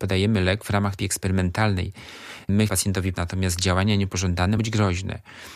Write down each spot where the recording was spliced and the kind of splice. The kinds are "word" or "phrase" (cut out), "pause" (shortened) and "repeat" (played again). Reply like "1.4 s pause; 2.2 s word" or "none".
1.0 s word; 2.7 s word; 3.1 s word; 4.6 s word

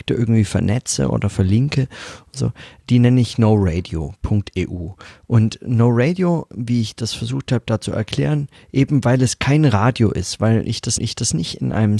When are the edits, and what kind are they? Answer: 6.5 s word; 11.0 s repeat

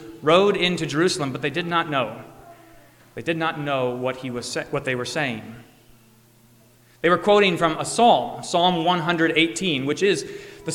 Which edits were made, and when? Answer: none

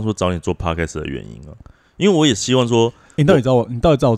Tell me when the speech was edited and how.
none

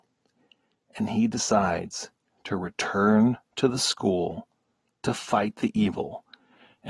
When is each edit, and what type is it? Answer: none

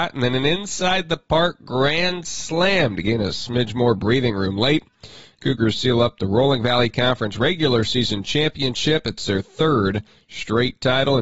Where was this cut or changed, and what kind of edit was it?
none

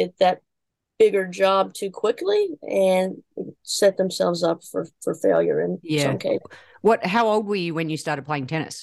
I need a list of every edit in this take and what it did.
none

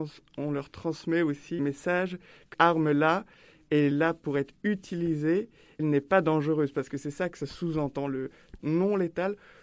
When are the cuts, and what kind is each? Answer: 1.6 s word; 2.5 s word; 3.9 s word; 5.8 s word; 8.6 s word

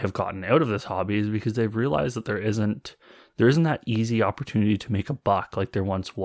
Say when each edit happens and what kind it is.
none

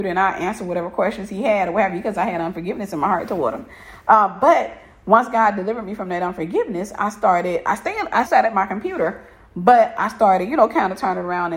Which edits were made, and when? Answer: 8.3 s word

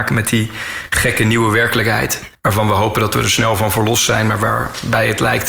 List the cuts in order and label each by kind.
none

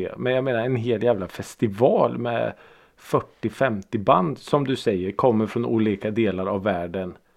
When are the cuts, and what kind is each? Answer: none

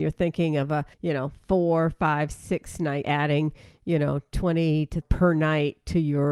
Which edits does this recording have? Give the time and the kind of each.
0.9 s pause; 3.0 s word; 5.0 s phrase

